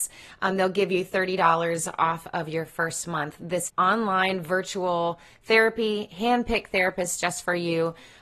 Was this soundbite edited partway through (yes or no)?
yes